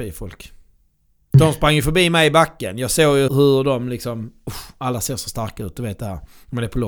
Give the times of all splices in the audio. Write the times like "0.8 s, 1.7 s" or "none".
3.3 s